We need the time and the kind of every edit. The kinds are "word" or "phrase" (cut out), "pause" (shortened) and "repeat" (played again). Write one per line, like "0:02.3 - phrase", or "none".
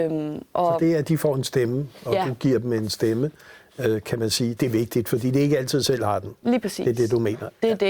0:04.6 - word